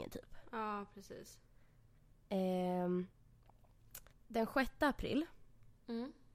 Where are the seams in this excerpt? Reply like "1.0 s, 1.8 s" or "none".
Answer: 4.1 s

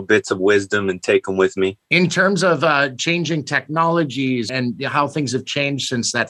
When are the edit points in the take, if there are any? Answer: 1.8 s

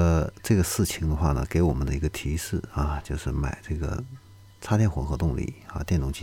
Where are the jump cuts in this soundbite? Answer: none

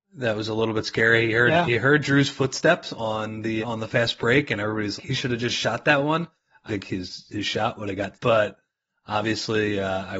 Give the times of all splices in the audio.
3.6 s, 5.0 s, 6.7 s, 8.1 s

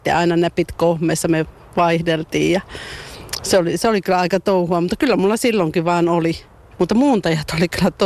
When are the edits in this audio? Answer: none

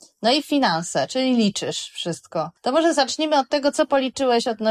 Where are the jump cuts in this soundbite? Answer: 2.6 s

